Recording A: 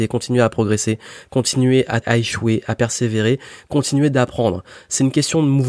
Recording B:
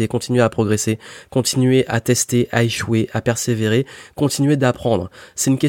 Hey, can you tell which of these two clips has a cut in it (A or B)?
A